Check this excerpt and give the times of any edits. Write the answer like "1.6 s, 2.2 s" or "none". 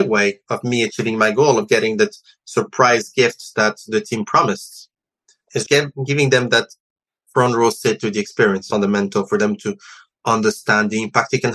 5.6 s, 8.7 s